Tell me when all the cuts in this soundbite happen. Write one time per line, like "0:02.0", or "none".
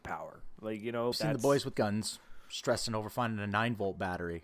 0:01.1
0:01.7